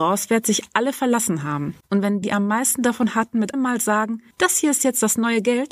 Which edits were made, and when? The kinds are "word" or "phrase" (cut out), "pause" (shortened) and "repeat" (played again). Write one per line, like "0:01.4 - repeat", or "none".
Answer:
0:01.8 - pause
0:02.2 - word
0:03.5 - word
0:04.3 - pause

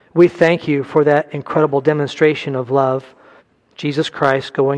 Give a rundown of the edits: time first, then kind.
0:03.4 - pause

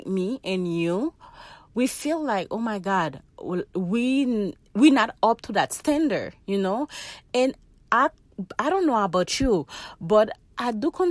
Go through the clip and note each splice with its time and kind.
none

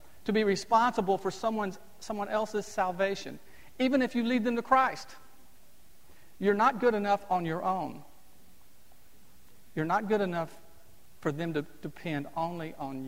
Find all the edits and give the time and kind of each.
none

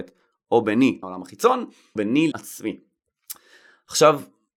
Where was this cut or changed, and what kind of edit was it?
0:01.0 - word
0:02.0 - word
0:02.3 - word

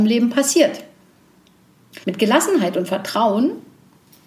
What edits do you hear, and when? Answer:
0:02.0 - pause

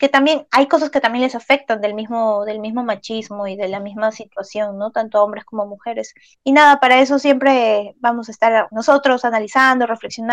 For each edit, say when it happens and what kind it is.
0:06.3 - pause
0:08.7 - word

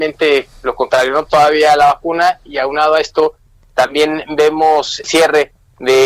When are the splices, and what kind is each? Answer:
0:01.3 - word
0:05.0 - word

